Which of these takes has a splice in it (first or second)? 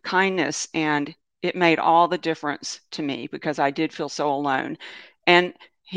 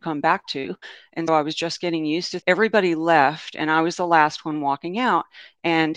second